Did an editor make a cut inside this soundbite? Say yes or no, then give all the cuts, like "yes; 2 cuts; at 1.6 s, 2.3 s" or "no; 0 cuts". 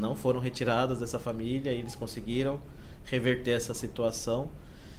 no; 0 cuts